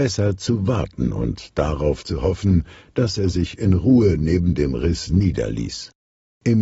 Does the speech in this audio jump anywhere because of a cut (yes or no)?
no